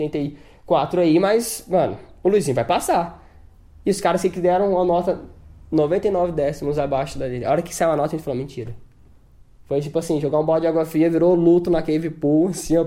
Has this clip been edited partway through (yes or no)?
no